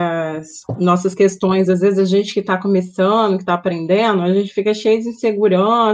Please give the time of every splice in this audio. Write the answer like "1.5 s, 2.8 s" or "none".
none